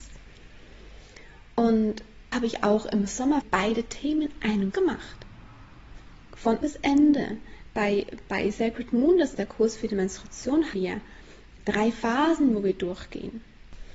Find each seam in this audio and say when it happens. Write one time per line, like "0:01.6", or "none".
0:02.3
0:03.4
0:04.7
0:06.6
0:09.3
0:10.7
0:11.6